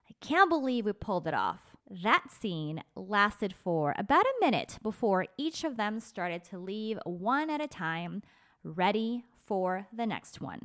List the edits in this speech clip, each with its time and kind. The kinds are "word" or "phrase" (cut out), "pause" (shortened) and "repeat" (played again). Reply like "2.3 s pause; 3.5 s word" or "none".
1.8 s pause